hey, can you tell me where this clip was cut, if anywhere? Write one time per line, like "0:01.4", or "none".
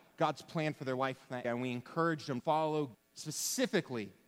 0:01.4
0:02.4
0:02.9